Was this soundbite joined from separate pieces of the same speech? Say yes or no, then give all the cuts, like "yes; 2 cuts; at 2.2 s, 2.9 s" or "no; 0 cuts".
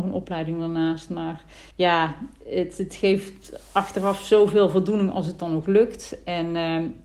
yes; 1 cut; at 1.7 s